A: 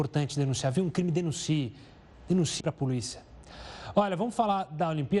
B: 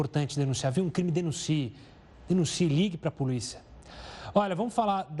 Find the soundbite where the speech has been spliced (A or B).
A